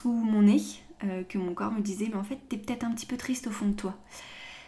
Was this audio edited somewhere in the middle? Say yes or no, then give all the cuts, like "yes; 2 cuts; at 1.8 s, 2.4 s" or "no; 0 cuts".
no; 0 cuts